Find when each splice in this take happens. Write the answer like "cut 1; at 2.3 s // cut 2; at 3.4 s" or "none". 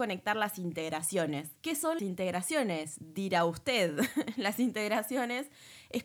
cut 1; at 1.6 s // cut 2; at 2.0 s